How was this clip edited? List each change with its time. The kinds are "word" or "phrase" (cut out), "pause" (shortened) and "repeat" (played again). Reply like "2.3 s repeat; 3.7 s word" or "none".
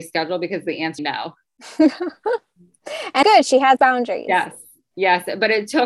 1.0 s phrase; 3.2 s word; 3.8 s word